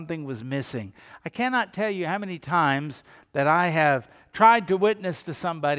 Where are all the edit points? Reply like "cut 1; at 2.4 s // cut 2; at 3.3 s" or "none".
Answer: none